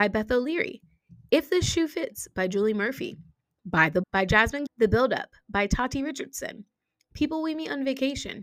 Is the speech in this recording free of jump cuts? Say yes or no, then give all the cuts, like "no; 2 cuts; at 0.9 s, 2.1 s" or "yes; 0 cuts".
no; 2 cuts; at 4.0 s, 4.7 s